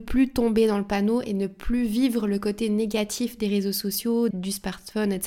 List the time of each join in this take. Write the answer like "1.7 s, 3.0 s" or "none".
4.3 s